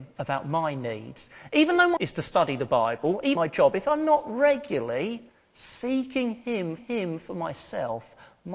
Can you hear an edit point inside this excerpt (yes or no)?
yes